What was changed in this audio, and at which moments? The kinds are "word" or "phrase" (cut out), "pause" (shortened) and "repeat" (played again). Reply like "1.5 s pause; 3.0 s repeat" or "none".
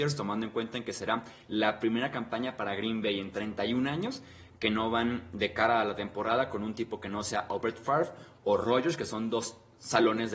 none